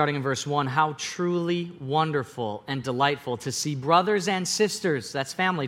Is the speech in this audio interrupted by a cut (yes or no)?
no